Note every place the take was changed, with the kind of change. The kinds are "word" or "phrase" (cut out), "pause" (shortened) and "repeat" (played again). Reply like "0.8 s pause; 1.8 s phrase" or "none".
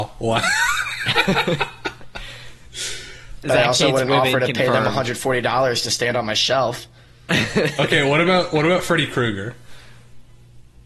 3.4 s phrase